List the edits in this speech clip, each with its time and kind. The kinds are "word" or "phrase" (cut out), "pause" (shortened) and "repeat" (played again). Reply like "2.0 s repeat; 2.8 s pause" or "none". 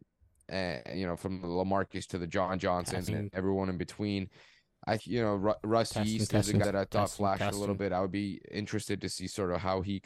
2.1 s word; 3.1 s word; 5.0 s word; 6.6 s word